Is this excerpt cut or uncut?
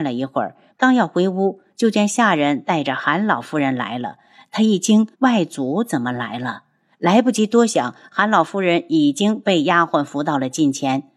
cut